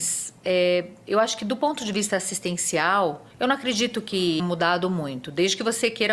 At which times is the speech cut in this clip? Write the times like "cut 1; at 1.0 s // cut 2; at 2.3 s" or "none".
cut 1; at 3.3 s // cut 2; at 4.4 s